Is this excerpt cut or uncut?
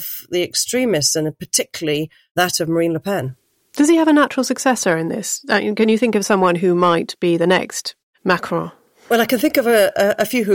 uncut